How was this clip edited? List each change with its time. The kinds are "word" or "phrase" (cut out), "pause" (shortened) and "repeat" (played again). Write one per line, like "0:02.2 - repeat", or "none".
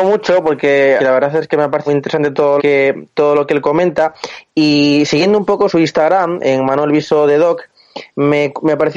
0:01.0 - phrase
0:01.9 - word
0:02.6 - word
0:05.7 - word